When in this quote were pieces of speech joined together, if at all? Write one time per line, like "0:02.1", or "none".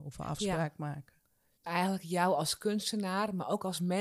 0:01.7